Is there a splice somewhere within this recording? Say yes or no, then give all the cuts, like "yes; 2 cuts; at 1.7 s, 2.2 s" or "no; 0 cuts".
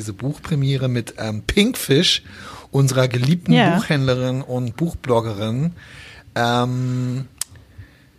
no; 0 cuts